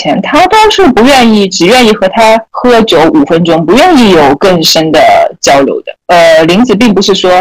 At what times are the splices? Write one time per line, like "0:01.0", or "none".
0:02.5